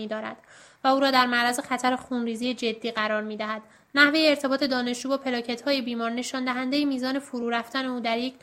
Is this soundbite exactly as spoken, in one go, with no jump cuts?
yes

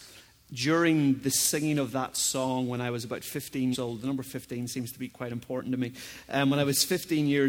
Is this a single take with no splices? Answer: no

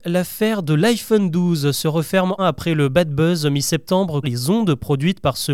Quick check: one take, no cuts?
no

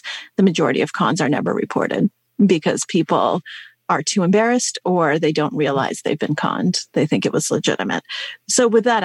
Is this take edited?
no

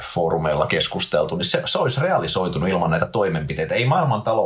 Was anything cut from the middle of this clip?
no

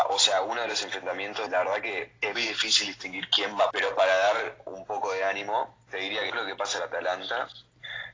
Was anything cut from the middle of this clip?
yes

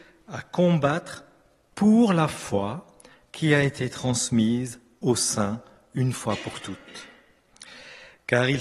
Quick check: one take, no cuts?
yes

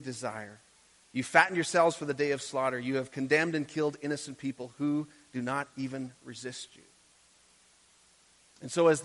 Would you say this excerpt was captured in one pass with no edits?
yes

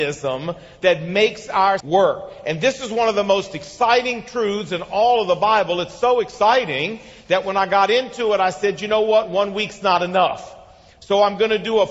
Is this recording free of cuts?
no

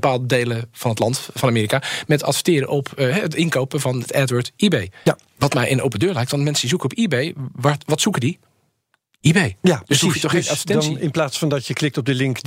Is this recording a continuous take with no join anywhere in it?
no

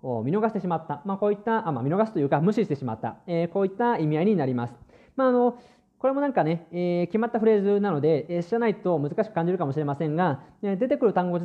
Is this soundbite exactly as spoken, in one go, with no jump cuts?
yes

